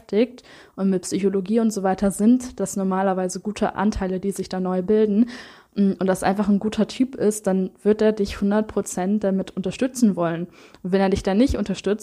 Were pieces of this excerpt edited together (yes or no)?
no